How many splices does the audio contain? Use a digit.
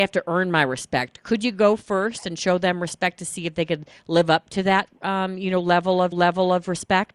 1